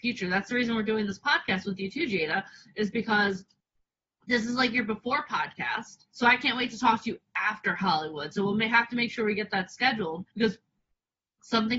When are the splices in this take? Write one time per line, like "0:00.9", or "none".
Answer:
0:06.1
0:10.3